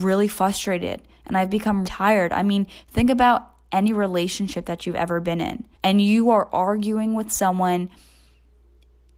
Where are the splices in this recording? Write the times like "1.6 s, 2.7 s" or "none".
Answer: 1.8 s, 5.7 s